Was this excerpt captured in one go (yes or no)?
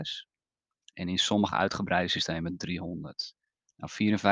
yes